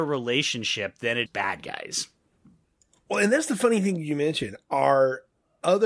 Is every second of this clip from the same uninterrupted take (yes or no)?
no